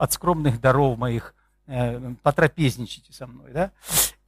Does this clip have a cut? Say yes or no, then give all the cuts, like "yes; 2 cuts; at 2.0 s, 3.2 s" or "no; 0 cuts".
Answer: no; 0 cuts